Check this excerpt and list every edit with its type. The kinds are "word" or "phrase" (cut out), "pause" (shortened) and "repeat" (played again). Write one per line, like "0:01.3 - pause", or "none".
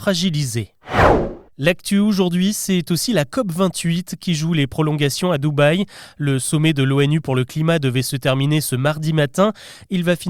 0:01.5 - pause